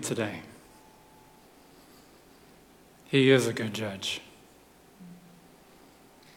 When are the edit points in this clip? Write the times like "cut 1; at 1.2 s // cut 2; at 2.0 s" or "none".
none